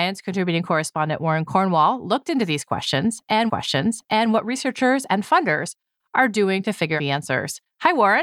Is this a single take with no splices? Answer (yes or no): no